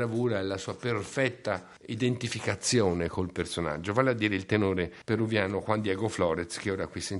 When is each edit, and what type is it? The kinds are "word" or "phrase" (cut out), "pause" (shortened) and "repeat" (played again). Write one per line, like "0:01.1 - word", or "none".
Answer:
0:01.8 - pause
0:05.0 - pause